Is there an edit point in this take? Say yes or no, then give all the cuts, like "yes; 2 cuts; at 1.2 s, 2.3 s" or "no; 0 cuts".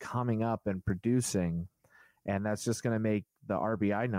no; 0 cuts